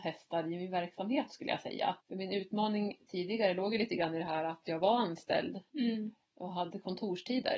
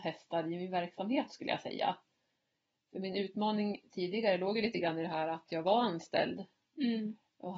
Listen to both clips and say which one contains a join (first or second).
first